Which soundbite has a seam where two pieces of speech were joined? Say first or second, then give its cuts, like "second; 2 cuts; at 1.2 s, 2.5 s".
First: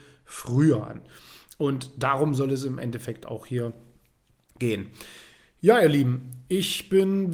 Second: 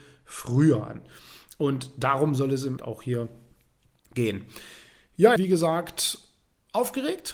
second; 2 cuts; at 2.8 s, 5.4 s